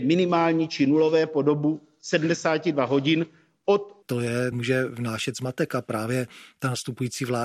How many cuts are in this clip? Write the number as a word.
two